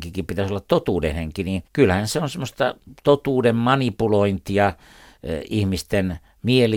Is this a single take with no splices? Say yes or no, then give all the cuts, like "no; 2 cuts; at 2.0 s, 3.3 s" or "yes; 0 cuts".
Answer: no; 1 cut; at 1.7 s